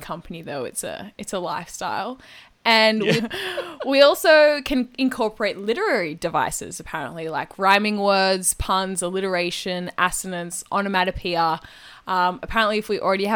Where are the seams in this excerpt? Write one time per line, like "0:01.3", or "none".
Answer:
0:03.2